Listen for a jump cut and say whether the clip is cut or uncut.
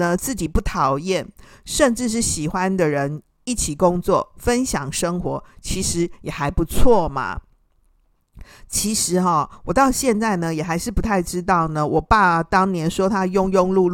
uncut